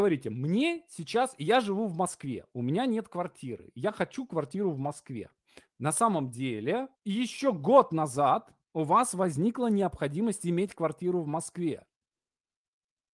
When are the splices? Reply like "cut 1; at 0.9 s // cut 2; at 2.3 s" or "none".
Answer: cut 1; at 7.0 s // cut 2; at 8.6 s